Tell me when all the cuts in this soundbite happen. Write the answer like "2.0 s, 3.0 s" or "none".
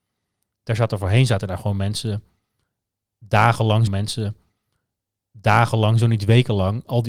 3.9 s

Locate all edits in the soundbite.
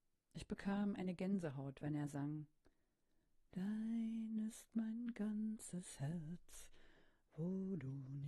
none

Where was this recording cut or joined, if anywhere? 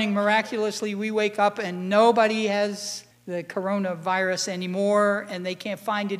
3.1 s

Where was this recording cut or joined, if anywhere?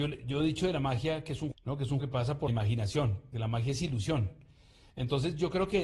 1.5 s, 2.0 s, 2.5 s, 3.3 s

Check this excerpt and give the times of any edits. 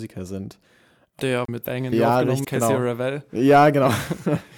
1.2 s, 1.6 s, 1.9 s, 2.4 s

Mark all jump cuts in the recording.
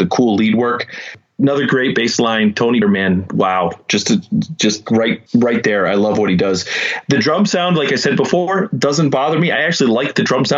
2.8 s, 5.3 s

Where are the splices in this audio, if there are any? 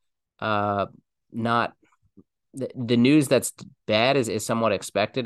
none

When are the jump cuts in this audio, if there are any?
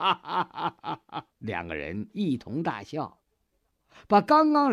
1.3 s

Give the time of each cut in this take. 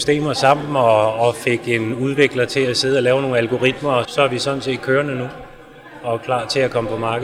4.0 s

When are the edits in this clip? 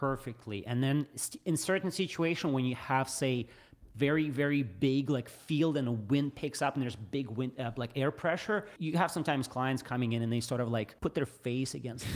11.0 s

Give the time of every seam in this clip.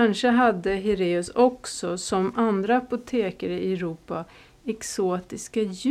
none

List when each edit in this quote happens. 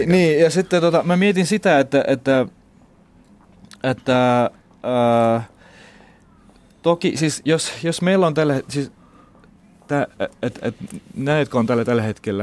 none

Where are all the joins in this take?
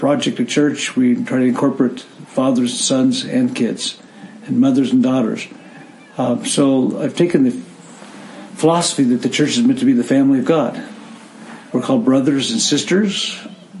none

